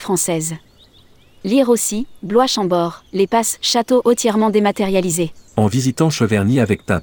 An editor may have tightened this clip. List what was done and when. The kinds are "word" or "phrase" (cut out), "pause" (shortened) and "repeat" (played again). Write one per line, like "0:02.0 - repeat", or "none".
0:03.1 - pause
0:05.5 - pause